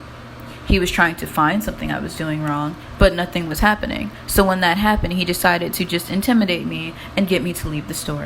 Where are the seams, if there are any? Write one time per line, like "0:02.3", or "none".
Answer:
none

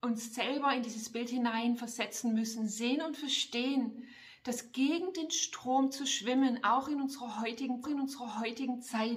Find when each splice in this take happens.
0:07.8

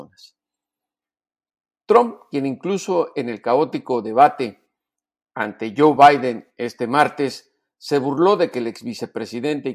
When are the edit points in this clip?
none

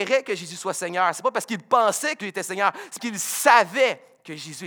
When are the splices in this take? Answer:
0:02.2
0:03.0

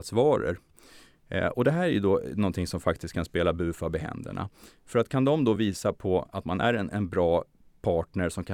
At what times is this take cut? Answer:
none

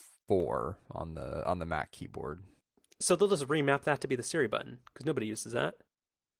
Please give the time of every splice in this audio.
none

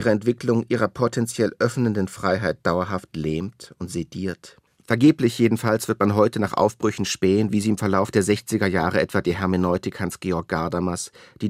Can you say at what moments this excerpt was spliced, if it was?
0:04.7

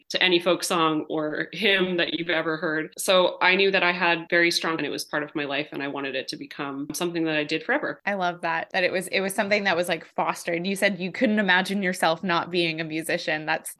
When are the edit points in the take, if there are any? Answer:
0:04.8

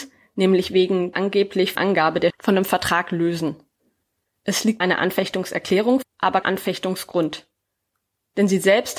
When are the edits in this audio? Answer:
0:01.1
0:01.8
0:02.3
0:04.8
0:06.0
0:06.4

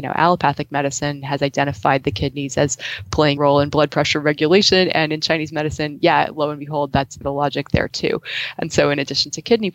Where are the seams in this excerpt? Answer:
0:03.4
0:07.2

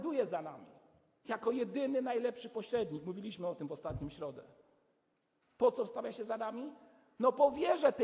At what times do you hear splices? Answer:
none

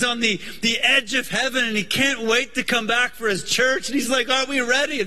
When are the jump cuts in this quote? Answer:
none

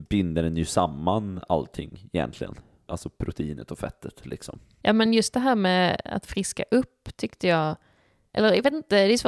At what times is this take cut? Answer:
none

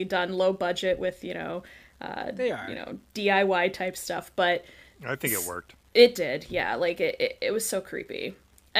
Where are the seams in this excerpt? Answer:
none

